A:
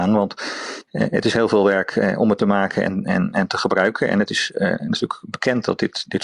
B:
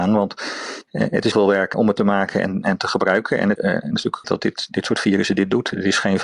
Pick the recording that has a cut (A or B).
B